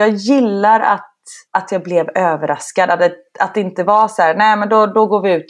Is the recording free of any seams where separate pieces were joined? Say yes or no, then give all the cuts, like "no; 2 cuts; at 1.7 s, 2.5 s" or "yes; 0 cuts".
yes; 0 cuts